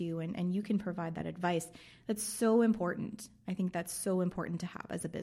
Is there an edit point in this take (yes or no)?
no